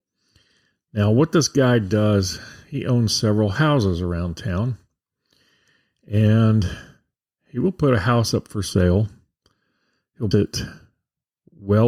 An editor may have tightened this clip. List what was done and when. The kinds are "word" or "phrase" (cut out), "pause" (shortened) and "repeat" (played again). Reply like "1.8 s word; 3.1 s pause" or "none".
10.3 s word